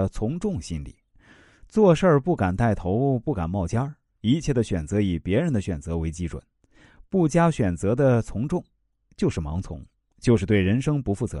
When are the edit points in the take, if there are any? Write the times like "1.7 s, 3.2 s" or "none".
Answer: none